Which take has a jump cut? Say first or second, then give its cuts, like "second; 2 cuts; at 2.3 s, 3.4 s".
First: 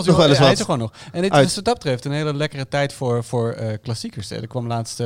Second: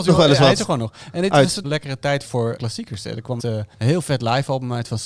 second; 5 cuts; at 1.6 s, 2.2 s, 2.6 s, 3.4 s, 3.7 s